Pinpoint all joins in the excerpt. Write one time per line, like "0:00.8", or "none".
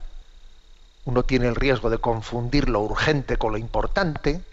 none